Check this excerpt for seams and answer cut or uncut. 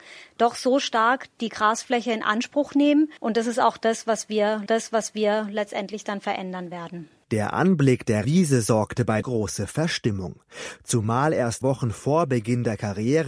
cut